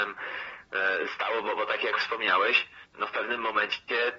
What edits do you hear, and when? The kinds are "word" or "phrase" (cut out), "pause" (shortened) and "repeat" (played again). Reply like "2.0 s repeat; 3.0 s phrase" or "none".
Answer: 2.9 s pause